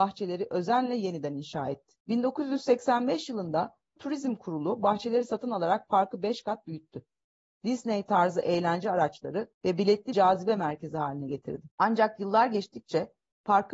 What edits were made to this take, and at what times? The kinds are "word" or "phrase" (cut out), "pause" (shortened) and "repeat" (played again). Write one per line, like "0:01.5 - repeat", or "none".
0:02.0 - pause
0:04.0 - word
0:09.5 - pause
0:10.1 - word
0:11.7 - pause

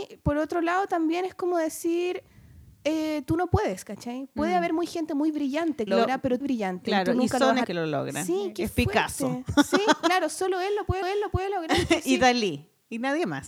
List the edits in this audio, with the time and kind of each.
0:05.9 - phrase
0:06.4 - phrase
0:07.6 - phrase
0:11.0 - repeat

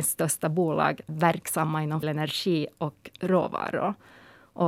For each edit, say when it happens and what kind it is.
0:01.1 - word
0:02.0 - word

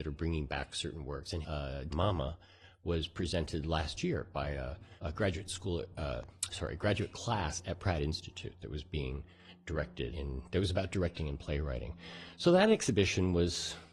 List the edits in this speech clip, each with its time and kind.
0:01.4 - phrase
0:01.9 - phrase
0:05.0 - pause
0:10.1 - word

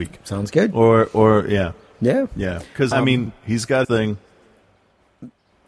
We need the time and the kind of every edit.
0:02.9 - word
0:03.8 - word

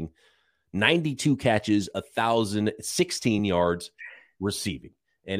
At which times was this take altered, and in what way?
none

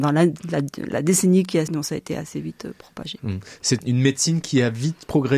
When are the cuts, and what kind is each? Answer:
0:01.7 - word
0:03.8 - word

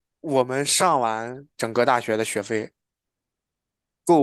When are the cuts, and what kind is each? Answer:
none

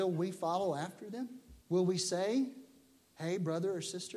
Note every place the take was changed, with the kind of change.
0:01.6 - pause

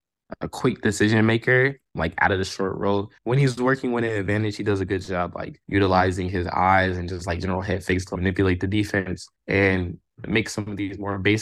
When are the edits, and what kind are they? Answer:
0:03.2 - pause
0:05.6 - pause
0:09.4 - pause

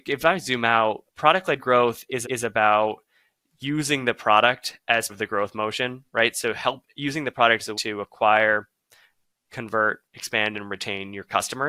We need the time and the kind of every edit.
0:01.1 - pause
0:02.2 - repeat
0:05.1 - word
0:07.7 - word
0:10.1 - pause

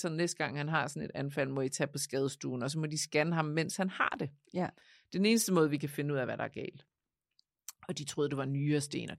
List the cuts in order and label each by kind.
none

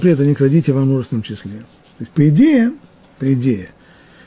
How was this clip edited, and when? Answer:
none

